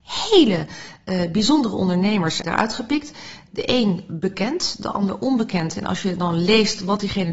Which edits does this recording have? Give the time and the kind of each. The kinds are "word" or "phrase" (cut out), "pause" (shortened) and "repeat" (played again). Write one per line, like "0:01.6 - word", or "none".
0:02.4 - word